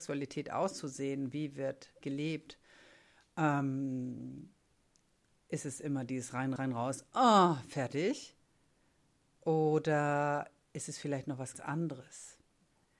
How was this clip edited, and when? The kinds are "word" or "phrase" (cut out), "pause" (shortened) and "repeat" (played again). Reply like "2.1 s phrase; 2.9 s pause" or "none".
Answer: 2.0 s word; 6.6 s word; 11.5 s word